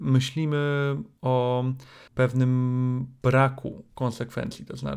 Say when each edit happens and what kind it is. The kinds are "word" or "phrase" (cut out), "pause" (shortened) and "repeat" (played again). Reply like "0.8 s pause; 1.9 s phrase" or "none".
2.1 s pause